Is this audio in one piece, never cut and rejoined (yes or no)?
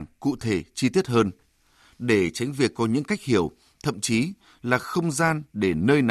yes